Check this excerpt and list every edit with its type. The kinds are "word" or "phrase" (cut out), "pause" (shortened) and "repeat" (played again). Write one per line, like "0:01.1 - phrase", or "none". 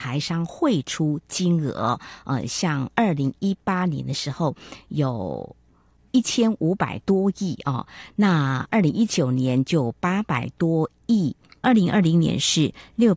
none